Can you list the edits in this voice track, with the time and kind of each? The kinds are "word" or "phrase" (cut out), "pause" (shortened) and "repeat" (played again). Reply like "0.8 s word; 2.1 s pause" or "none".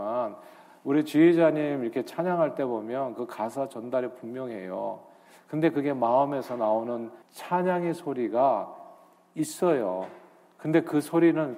7.2 s pause